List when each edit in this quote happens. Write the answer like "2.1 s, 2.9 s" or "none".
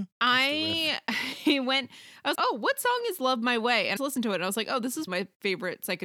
2.3 s, 4.0 s, 5.1 s